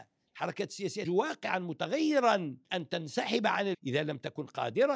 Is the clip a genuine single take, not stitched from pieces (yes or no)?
no